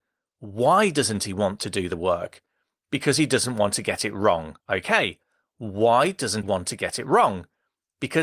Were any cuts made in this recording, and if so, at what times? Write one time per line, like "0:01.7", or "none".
0:04.6
0:06.4